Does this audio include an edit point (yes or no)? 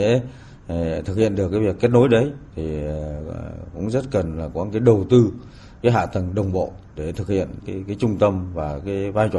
yes